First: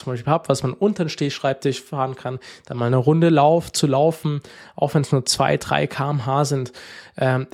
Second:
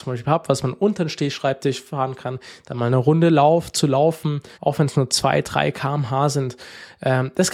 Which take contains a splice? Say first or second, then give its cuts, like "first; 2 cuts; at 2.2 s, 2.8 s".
second; 1 cut; at 4.5 s